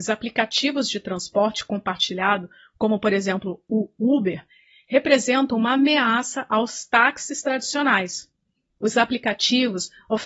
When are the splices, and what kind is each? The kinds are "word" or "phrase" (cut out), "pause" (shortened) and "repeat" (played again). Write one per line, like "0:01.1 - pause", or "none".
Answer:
none